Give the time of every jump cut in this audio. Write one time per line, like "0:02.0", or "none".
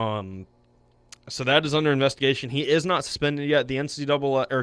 none